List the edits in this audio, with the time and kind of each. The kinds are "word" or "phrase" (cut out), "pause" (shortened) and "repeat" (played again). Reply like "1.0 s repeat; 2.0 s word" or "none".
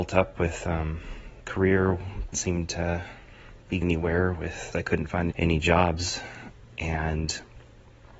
1.4 s word; 2.3 s word; 3.8 s word; 4.7 s word; 5.3 s word

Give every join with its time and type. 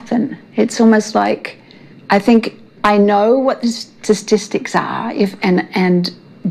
1.9 s pause

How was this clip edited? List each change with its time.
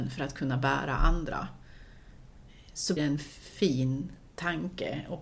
3.0 s word

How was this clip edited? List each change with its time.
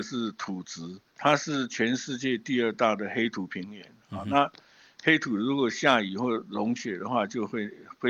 1.1 s pause

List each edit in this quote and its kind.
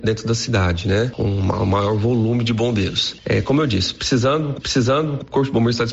4.6 s repeat

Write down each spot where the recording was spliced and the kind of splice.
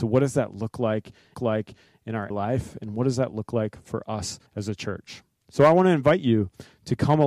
1.3 s repeat; 2.3 s word; 4.5 s pause

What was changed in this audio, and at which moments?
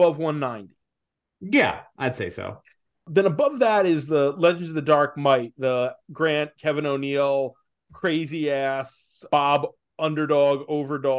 none

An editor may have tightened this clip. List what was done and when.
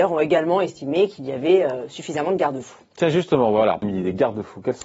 3.8 s word

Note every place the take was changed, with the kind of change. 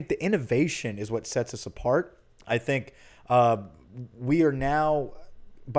2.3 s pause

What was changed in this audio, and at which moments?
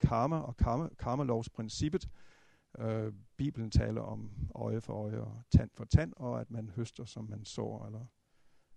none

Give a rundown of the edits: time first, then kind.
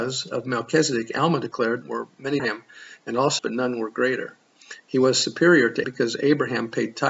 1.8 s word; 2.4 s word; 3.4 s phrase; 5.8 s word

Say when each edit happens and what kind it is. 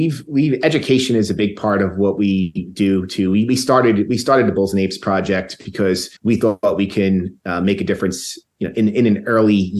6.2 s pause

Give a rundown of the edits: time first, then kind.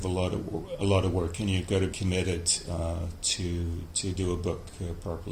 1.9 s word

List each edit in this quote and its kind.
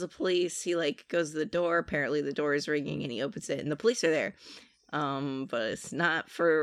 none

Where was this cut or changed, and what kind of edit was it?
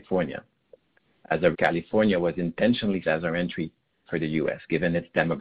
1.5 s word; 3.0 s word; 4.1 s word

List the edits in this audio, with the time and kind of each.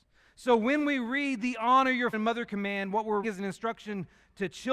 2.1 s word; 3.2 s word

